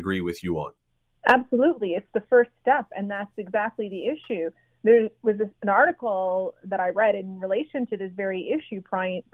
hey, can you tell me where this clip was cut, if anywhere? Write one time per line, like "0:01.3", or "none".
none